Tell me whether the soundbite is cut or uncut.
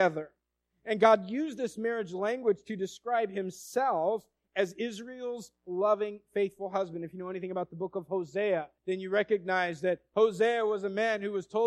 cut